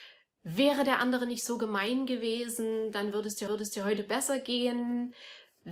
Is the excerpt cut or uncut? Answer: cut